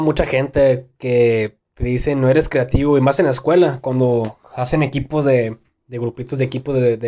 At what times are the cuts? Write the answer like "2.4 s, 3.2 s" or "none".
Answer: none